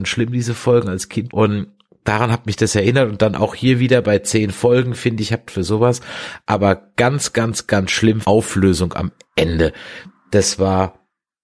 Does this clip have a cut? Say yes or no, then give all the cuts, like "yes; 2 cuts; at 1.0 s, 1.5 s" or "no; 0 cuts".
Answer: yes; 3 cuts; at 1.3 s, 5.5 s, 8.2 s